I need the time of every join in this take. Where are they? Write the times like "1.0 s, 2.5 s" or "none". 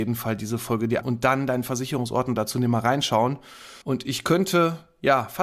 1.0 s, 3.8 s